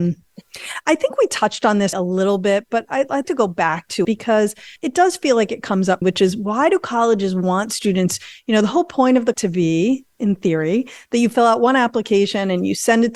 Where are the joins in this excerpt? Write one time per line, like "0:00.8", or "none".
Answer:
0:01.9
0:03.2
0:04.0
0:04.8
0:06.0
0:09.3